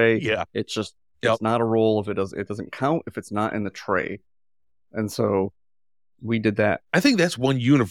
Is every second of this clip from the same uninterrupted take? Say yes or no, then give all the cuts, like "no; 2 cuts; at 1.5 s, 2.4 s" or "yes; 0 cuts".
yes; 0 cuts